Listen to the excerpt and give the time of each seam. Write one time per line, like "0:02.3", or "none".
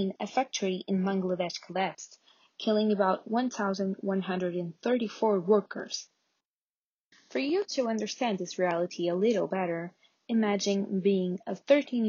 none